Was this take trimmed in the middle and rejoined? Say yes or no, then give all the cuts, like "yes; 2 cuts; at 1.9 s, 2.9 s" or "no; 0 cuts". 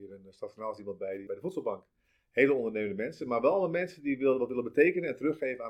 yes; 1 cut; at 1.3 s